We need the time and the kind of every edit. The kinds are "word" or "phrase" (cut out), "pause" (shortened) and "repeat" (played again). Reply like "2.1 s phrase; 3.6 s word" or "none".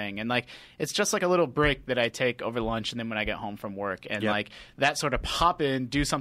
none